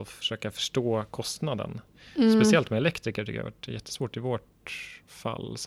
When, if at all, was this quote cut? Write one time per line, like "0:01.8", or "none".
none